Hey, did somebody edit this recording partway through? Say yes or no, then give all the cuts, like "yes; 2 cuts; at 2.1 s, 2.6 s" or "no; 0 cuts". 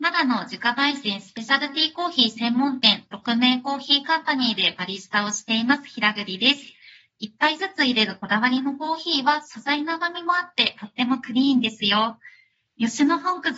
no; 0 cuts